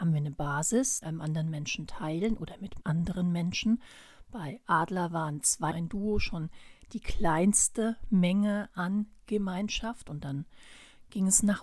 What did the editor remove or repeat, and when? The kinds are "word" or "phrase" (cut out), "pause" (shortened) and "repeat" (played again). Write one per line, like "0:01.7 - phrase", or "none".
0:01.0 - phrase
0:02.8 - word
0:05.7 - word